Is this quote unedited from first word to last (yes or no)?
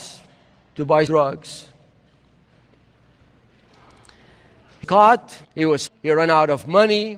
no